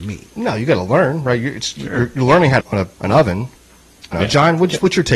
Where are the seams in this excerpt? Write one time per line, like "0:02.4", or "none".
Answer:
0:02.6
0:02.9
0:04.1